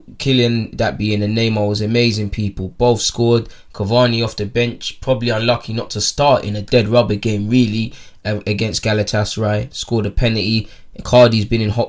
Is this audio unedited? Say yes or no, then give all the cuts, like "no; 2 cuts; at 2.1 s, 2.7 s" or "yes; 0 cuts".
yes; 0 cuts